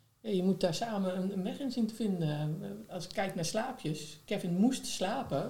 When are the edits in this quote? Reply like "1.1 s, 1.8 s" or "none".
none